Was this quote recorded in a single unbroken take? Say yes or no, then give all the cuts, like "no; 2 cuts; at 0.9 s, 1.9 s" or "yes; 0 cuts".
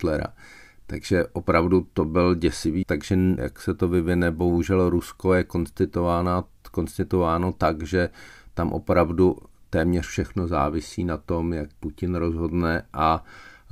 no; 3 cuts; at 2.8 s, 3.4 s, 11.7 s